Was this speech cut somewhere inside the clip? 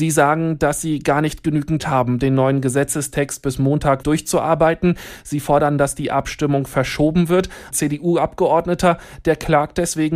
yes; 3 cuts; at 1.8 s, 4.0 s, 7.7 s

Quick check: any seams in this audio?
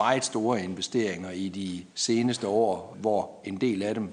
yes; 2 cuts; at 1.9 s, 2.9 s

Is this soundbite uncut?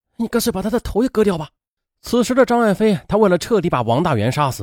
no; 1 cut; at 1.8 s

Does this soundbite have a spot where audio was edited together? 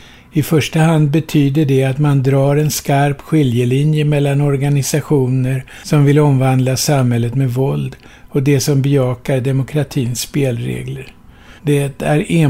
yes; 1 cut; at 11.6 s

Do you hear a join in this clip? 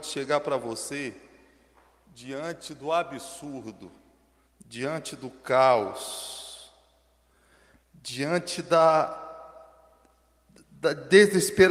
no; 0 cuts

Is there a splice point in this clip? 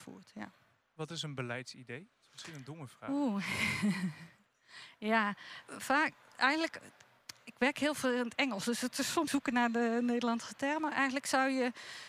yes; 2 cuts; at 5.6 s, 9.3 s

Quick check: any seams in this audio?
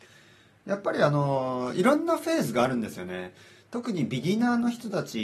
no; 0 cuts

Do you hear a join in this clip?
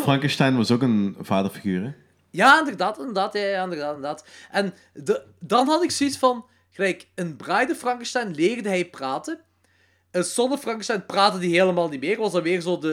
no; 0 cuts

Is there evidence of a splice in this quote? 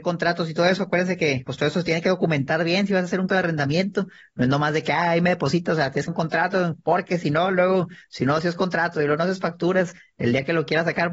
yes; 2 cuts; at 3.3 s, 6.1 s

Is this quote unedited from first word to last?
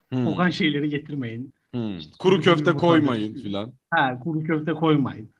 yes; 0 cuts

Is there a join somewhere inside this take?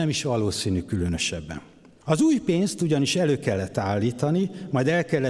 no; 0 cuts

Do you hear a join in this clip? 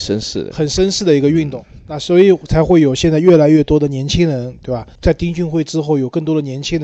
yes; 1 cut; at 5.0 s

